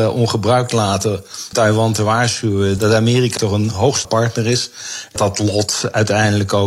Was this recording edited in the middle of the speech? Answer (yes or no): yes